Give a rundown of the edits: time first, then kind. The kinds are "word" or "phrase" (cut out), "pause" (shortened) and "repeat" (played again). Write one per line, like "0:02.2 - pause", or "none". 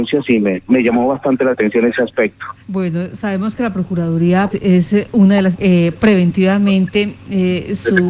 0:02.6 - pause
0:04.5 - word
0:05.5 - phrase